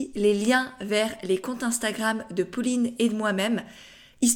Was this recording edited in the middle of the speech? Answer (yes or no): no